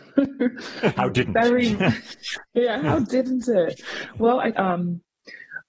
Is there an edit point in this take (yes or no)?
yes